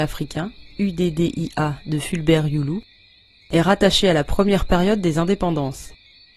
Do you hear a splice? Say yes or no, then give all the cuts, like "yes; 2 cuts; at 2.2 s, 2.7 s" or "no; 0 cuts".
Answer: no; 0 cuts